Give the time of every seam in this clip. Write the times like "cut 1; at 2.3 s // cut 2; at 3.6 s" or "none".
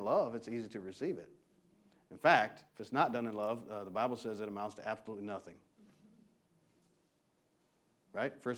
cut 1; at 2.7 s